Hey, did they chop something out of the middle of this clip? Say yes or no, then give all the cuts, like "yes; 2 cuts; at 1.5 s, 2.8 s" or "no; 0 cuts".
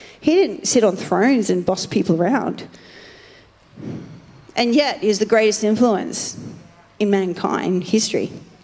no; 0 cuts